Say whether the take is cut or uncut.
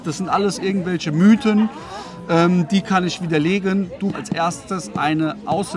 cut